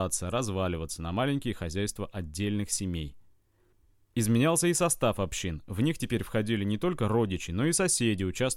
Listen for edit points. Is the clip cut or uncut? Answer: uncut